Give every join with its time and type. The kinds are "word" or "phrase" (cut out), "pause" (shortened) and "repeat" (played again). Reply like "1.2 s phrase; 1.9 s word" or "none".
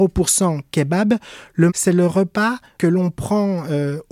1.7 s word; 2.8 s word

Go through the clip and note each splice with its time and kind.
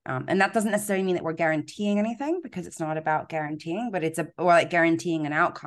none

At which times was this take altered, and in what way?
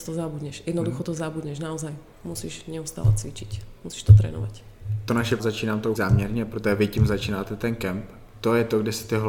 5.4 s phrase; 5.9 s word

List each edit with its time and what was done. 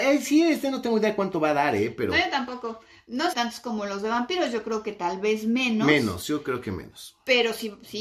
3.3 s phrase

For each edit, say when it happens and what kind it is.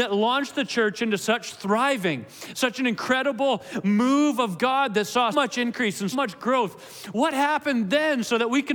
5.3 s word; 6.1 s word

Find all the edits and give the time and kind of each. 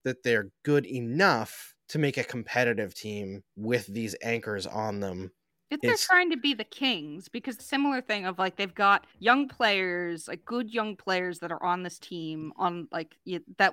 1.8 s pause; 3.5 s pause; 5.8 s word; 7.6 s phrase; 9.1 s pause

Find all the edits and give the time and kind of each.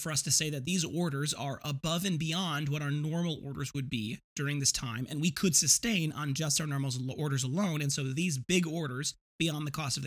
4.2 s pause

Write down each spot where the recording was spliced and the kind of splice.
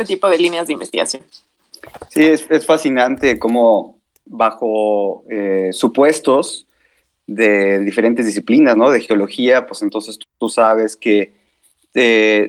none

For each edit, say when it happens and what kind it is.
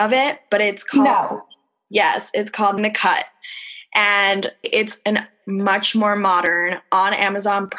2.8 s word; 4.6 s word; 5.4 s word

